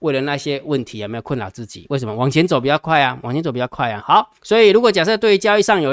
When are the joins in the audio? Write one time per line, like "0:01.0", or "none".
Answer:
0:04.0
0:04.4